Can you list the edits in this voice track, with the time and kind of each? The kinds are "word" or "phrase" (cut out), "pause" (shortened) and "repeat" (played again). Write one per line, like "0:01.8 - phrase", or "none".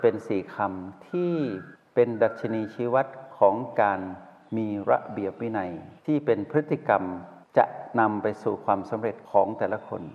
0:06.0 - pause